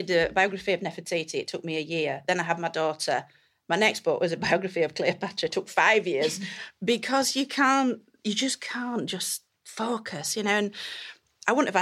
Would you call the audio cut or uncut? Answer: uncut